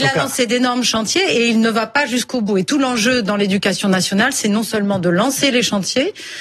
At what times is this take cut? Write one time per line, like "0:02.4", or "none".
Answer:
none